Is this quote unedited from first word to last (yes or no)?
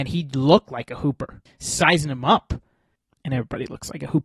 yes